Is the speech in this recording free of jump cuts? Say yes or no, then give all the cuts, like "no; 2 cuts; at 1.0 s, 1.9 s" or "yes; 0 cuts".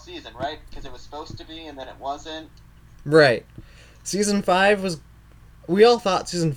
yes; 0 cuts